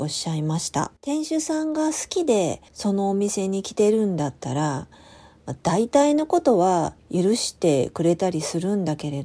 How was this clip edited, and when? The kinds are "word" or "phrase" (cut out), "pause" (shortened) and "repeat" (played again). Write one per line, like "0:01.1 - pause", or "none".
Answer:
0:01.0 - pause
0:02.7 - pause